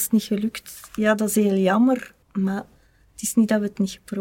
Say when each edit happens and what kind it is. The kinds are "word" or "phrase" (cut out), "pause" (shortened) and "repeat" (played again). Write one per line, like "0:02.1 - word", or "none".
0:02.2 - pause